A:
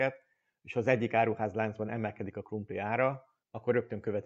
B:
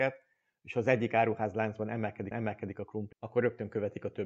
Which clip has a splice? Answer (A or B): B